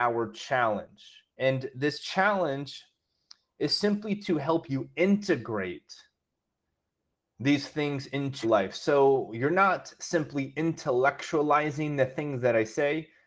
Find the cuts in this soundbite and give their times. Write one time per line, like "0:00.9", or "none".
0:01.3
0:08.4